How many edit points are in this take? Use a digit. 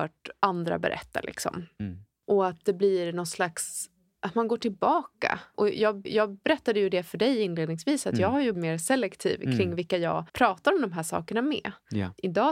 3